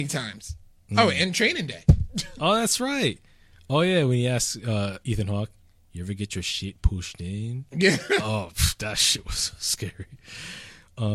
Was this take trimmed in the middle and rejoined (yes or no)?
no